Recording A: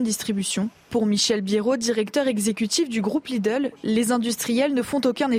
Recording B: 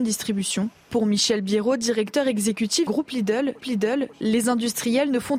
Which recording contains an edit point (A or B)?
B